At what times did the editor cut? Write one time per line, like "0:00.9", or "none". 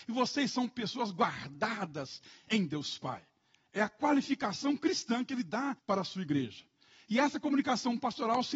0:05.8